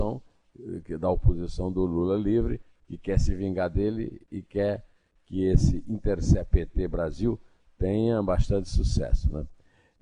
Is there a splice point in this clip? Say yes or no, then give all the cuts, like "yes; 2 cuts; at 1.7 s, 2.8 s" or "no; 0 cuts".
no; 0 cuts